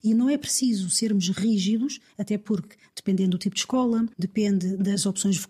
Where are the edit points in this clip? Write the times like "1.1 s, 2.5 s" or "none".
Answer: 4.1 s